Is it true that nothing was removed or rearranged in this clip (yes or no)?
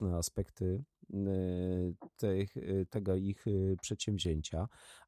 no